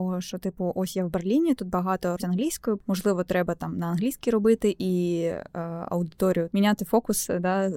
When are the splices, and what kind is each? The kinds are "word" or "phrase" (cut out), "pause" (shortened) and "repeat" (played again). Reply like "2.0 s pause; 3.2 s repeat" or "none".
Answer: 2.2 s word; 6.5 s word